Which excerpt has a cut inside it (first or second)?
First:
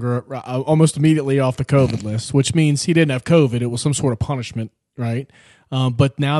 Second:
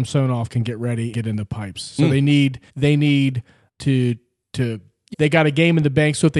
second